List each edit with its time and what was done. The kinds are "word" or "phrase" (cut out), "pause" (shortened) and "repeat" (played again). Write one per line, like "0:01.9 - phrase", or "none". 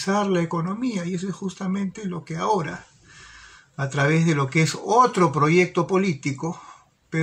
none